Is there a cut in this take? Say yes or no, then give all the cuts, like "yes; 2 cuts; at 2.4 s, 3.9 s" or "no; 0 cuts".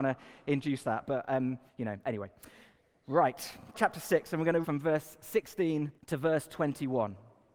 yes; 4 cuts; at 1.7 s, 3.7 s, 4.6 s, 6.0 s